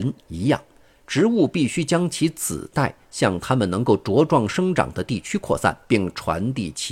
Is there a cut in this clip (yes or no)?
yes